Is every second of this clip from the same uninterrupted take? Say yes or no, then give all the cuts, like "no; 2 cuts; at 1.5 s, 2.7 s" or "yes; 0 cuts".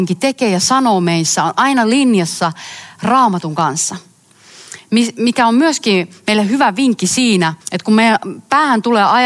no; 1 cut; at 7.6 s